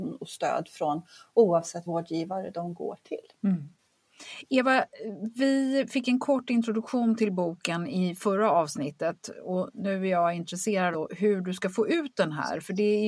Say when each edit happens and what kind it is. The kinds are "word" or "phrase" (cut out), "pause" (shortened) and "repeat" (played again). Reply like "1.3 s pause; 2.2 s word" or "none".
1.9 s word; 3.3 s pause; 10.9 s word